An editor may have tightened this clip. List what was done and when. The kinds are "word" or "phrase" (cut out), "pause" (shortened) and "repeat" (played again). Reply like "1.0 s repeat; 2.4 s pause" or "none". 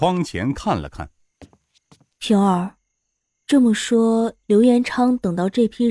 none